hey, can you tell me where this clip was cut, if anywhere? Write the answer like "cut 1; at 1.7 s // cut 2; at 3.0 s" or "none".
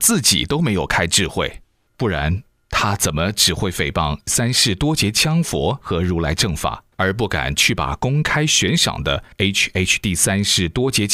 cut 1; at 4.3 s // cut 2; at 6.9 s // cut 3; at 9.3 s